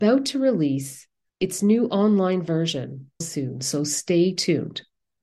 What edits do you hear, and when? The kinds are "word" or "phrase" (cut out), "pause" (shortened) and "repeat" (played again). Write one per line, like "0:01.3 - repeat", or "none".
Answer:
0:01.3 - pause
0:03.2 - phrase